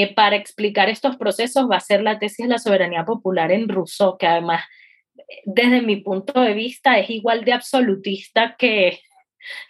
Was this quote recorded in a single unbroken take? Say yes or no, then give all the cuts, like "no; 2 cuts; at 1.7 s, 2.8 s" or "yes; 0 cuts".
yes; 0 cuts